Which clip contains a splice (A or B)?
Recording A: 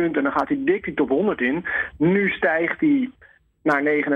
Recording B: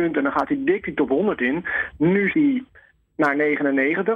B